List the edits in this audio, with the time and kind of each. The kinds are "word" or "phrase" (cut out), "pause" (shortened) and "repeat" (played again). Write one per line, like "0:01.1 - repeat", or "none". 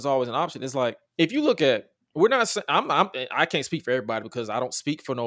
0:01.1 - pause